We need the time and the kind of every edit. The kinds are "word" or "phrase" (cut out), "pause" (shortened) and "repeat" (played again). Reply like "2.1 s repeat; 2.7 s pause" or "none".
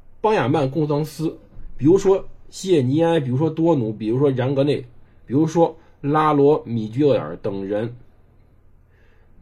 none